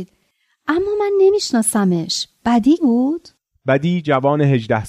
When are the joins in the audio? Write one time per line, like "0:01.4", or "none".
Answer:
0:02.8